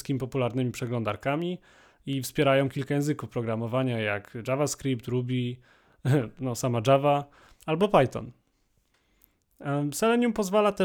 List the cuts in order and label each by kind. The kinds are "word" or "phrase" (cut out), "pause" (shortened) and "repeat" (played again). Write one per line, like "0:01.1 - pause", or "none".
none